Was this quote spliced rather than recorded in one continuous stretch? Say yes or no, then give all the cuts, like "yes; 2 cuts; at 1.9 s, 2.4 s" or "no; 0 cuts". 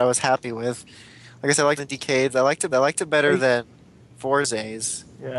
yes; 2 cuts; at 1.8 s, 2.7 s